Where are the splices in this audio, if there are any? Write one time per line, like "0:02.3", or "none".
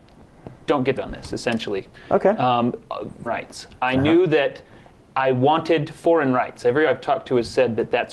0:01.0
0:03.3
0:06.9

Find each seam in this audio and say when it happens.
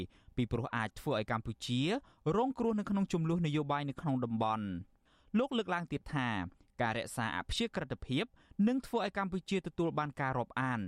none

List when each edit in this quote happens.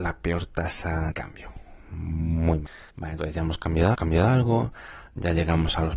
0:01.1
0:02.9
0:03.9

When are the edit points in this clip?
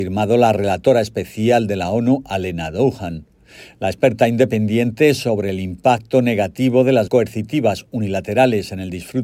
0:07.1

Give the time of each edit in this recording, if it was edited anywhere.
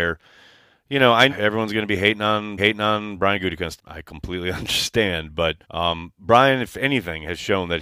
0:01.3
0:02.6
0:03.8
0:05.6

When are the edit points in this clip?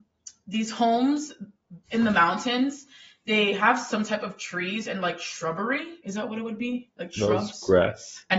none

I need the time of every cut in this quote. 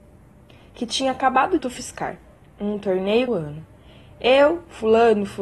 0:01.6
0:03.3

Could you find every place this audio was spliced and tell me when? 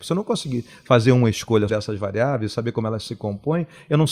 0:01.7

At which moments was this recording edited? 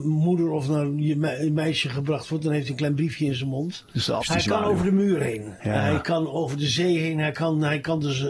0:04.2

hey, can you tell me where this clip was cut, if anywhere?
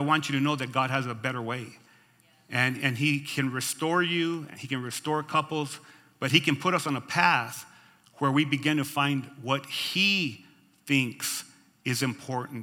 none

